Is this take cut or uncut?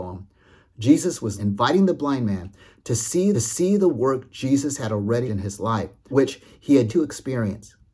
cut